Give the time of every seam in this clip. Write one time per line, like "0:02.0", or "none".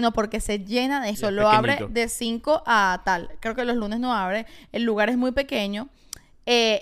0:01.1